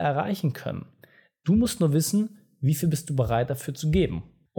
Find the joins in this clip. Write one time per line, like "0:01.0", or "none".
none